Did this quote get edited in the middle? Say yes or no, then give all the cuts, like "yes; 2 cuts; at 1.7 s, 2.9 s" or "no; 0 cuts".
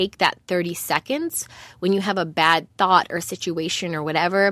no; 0 cuts